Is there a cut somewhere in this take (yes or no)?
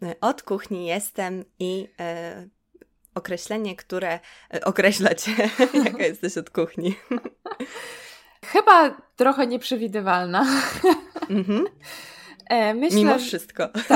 no